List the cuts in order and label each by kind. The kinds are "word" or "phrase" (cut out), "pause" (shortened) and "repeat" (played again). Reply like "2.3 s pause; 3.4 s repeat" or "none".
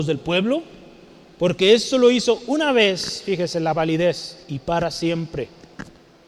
4.4 s pause